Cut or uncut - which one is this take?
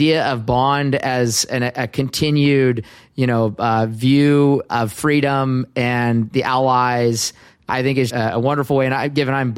cut